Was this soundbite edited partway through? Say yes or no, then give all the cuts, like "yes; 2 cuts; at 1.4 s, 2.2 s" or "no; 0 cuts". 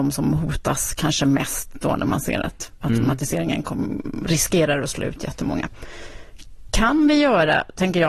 no; 0 cuts